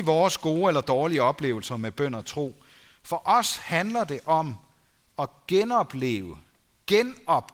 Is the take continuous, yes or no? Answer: yes